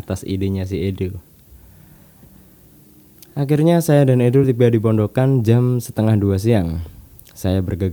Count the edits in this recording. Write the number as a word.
zero